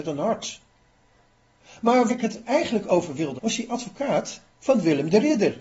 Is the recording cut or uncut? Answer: cut